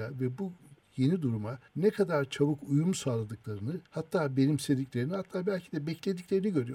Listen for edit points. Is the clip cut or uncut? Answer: cut